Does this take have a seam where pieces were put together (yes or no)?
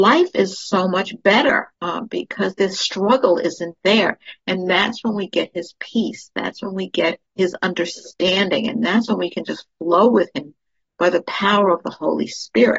yes